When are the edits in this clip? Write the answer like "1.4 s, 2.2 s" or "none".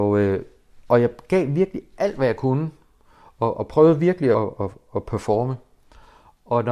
4.3 s

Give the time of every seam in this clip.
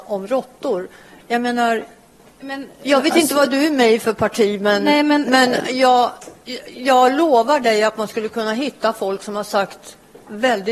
none

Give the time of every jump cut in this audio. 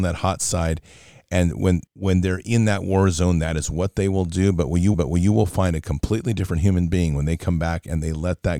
1.9 s, 4.9 s

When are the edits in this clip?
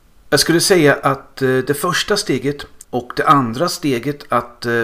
2.8 s

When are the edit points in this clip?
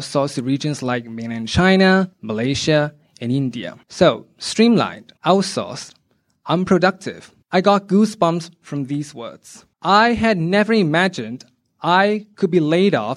2.1 s, 3.8 s, 5.2 s, 7.4 s, 9.7 s

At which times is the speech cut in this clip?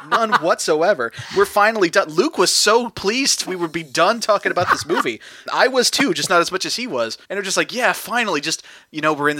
3.4 s, 5.5 s, 7.2 s

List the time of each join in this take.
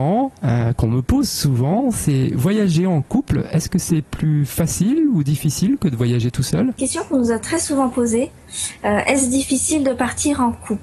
6.8 s

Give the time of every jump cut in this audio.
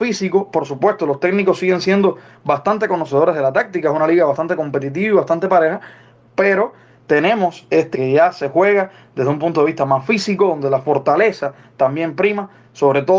7.9 s

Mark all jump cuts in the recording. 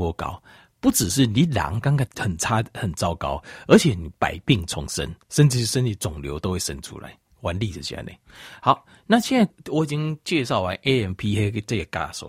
none

